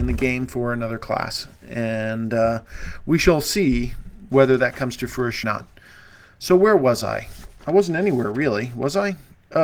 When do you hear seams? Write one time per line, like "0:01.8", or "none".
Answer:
0:05.4